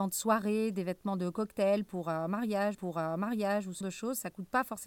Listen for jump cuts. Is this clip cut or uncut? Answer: cut